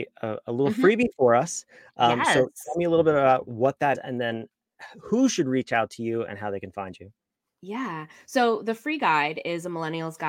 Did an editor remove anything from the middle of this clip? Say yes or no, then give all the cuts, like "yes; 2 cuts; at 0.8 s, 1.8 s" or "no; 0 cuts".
yes; 1 cut; at 3.9 s